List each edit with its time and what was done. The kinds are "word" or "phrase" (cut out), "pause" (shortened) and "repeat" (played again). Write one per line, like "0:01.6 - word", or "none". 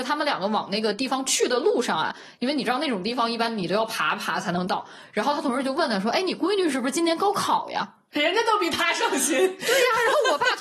0:08.1 - pause